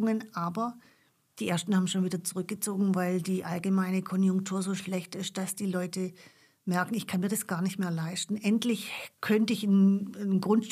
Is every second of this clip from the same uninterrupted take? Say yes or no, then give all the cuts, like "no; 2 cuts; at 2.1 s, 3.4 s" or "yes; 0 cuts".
yes; 0 cuts